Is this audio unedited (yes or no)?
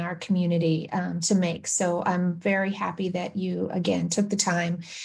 yes